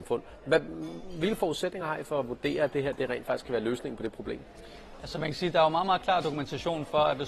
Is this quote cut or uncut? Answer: uncut